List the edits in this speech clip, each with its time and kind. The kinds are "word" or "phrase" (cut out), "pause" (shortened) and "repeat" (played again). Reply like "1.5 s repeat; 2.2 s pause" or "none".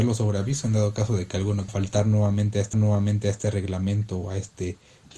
1.7 s phrase; 2.7 s repeat